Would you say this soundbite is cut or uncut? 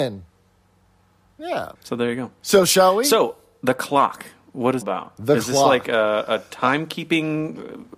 cut